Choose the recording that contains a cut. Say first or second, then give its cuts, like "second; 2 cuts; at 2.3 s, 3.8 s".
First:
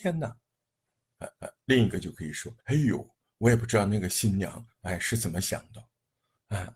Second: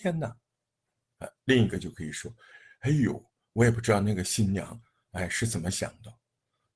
first; 3 cuts; at 1.4 s, 2.6 s, 4.7 s